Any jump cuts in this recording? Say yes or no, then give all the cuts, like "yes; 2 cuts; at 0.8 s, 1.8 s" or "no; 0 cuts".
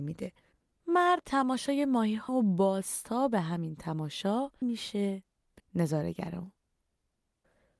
yes; 4 cuts; at 1.2 s, 2.3 s, 4.6 s, 5.6 s